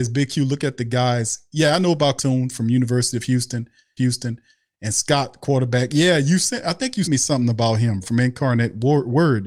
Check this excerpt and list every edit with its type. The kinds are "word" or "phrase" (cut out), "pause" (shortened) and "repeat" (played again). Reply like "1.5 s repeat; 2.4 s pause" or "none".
2.2 s word; 4.0 s repeat; 7.0 s word; 8.0 s word

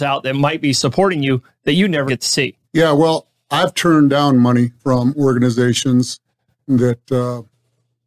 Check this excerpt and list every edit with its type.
2.1 s word; 2.6 s pause; 4.8 s pause

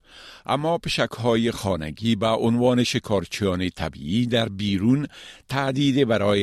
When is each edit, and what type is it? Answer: none

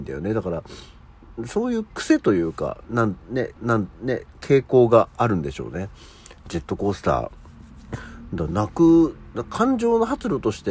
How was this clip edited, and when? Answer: 3.6 s repeat

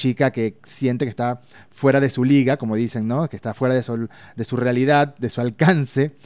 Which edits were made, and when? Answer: none

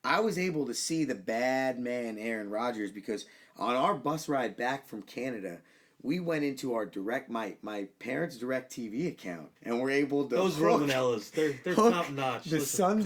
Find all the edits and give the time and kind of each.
9.6 s pause

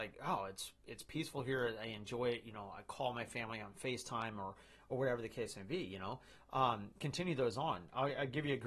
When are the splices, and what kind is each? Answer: none

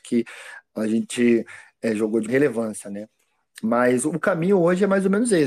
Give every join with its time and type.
2.3 s word

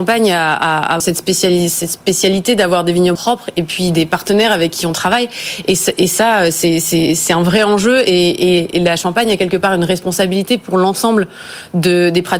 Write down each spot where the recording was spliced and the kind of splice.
1.0 s word; 3.1 s word

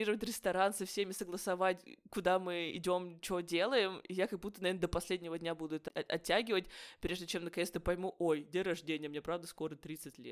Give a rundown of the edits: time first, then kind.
5.9 s word

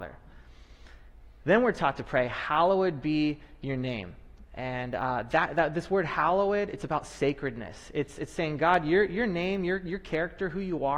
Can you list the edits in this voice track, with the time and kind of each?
none

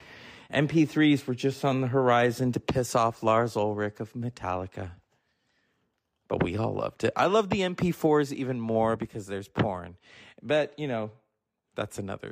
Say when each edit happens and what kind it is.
none

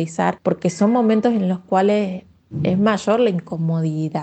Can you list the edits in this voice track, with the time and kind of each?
none

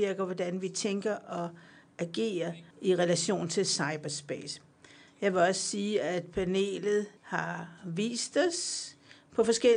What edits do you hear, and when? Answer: 2.7 s pause; 7.2 s pause

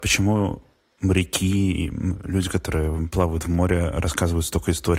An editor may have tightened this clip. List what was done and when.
none

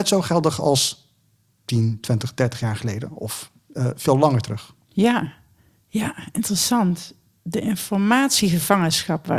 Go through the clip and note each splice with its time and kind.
none

